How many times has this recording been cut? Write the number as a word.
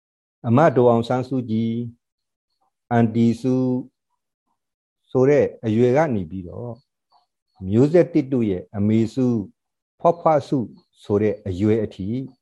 zero